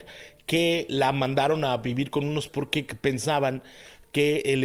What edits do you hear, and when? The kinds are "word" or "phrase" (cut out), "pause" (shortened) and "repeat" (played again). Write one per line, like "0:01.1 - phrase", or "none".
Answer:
0:02.5 - word